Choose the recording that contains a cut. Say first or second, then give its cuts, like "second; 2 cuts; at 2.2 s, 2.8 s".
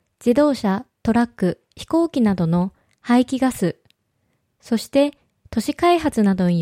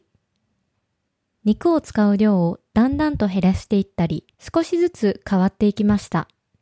second; 1 cut; at 4.3 s